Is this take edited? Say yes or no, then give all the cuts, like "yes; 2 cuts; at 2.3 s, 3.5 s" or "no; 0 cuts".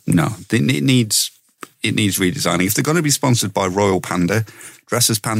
no; 0 cuts